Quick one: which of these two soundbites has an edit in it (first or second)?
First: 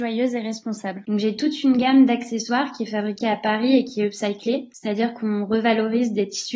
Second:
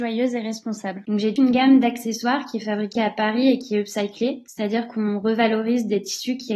second